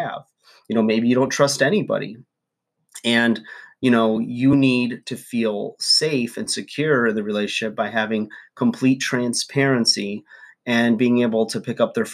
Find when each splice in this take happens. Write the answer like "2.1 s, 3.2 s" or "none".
none